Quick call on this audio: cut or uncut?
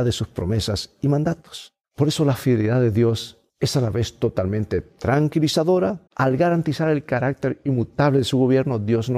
cut